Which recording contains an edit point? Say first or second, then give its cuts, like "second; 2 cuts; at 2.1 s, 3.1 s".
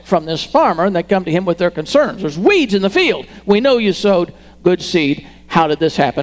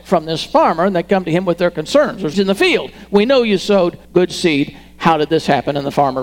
second; 2 cuts; at 2.3 s, 4.0 s